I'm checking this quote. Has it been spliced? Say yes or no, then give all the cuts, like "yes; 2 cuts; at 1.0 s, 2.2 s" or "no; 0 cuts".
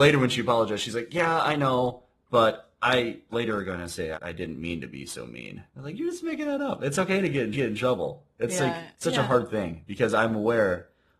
yes; 5 cuts; at 3.3 s, 4.1 s, 5.7 s, 7.5 s, 8.9 s